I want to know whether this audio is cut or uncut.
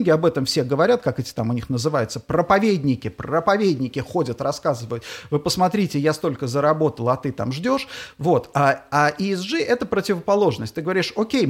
uncut